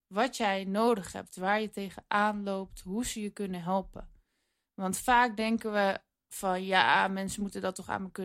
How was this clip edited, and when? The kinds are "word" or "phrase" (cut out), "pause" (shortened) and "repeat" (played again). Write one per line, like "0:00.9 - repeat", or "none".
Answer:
none